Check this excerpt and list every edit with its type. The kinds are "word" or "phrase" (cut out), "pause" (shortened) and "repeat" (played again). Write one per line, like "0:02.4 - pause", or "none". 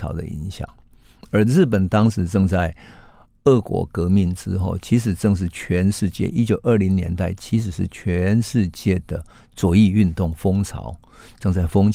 none